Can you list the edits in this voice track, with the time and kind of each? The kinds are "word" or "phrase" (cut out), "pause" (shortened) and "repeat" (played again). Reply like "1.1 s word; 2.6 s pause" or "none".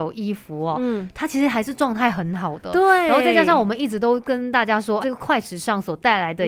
5.0 s word